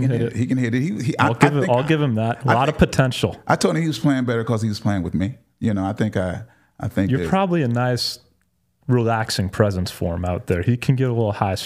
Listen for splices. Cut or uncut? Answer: uncut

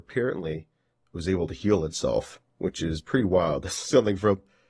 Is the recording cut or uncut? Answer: cut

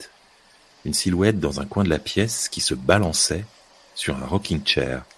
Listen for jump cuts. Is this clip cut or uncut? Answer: uncut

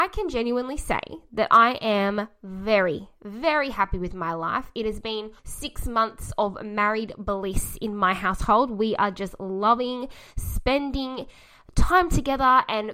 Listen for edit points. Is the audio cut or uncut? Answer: cut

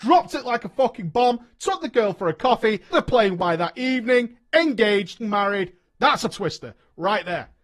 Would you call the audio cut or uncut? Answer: cut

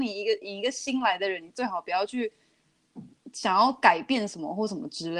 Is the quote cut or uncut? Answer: uncut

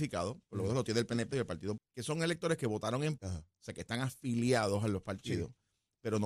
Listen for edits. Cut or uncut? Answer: cut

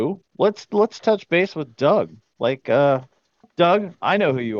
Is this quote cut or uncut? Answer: uncut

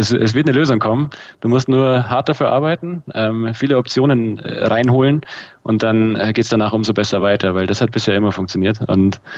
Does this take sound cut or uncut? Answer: uncut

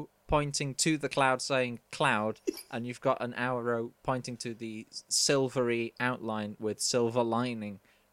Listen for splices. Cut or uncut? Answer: uncut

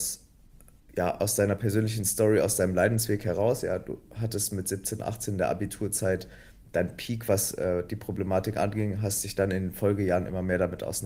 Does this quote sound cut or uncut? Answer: uncut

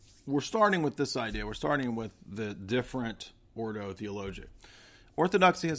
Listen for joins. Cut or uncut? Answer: uncut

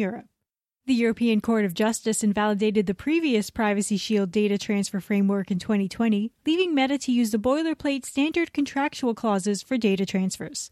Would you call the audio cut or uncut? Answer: uncut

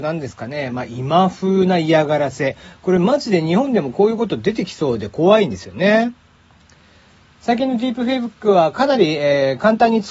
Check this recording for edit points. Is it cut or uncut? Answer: uncut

